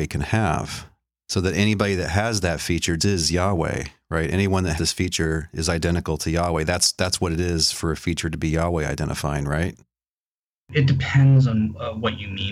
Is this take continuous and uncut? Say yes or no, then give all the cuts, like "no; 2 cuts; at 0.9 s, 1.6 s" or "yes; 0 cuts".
no; 2 cuts; at 3.0 s, 4.8 s